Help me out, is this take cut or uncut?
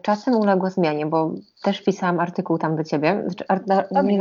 uncut